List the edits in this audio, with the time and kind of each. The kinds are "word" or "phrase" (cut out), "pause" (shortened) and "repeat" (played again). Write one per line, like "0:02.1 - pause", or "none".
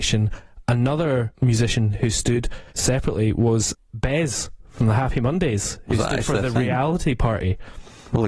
0:02.7 - pause